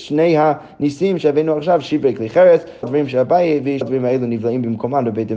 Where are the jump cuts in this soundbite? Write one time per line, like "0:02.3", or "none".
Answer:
0:02.8
0:03.8